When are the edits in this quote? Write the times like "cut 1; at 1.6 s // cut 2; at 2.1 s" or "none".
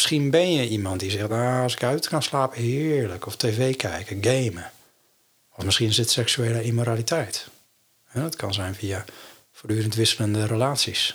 none